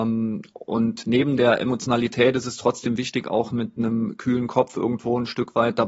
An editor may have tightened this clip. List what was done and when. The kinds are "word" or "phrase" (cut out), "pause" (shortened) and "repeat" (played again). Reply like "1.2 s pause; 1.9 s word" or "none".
none